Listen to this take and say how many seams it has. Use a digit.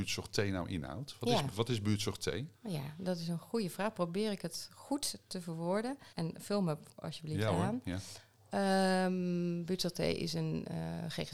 2